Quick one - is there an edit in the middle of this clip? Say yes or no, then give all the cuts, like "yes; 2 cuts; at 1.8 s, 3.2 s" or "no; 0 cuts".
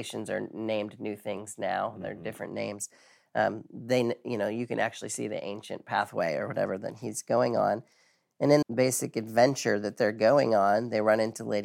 yes; 1 cut; at 8.6 s